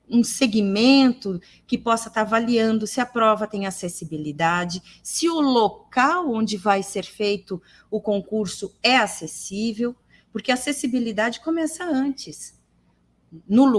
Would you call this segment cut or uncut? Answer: uncut